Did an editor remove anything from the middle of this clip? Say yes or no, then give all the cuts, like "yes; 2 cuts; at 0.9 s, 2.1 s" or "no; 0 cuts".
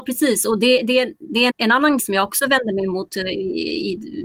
yes; 2 cuts; at 1.5 s, 2.0 s